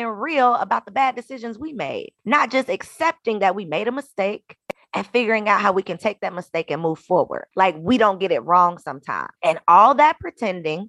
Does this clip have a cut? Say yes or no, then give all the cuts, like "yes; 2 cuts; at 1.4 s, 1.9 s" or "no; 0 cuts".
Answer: yes; 3 cuts; at 2.2 s, 7.5 s, 9.4 s